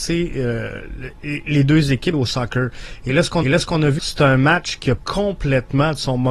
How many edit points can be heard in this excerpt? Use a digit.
4